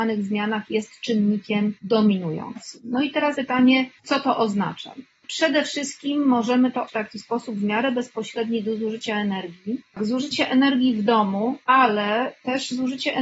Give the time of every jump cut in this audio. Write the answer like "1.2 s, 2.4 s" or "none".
1.8 s, 3.3 s, 4.0 s, 6.9 s, 11.6 s